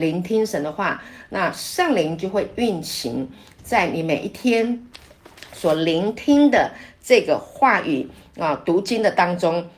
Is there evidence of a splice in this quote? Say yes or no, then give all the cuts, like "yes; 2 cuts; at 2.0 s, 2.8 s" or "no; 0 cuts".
no; 0 cuts